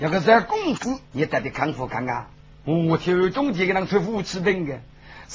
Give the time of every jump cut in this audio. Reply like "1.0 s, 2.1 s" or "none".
1.0 s, 2.4 s